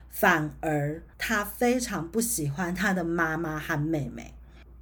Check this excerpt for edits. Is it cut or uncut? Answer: cut